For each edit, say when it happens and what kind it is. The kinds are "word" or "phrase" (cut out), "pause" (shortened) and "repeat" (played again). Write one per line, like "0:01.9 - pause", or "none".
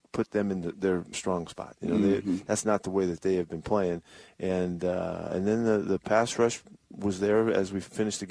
0:01.1 - word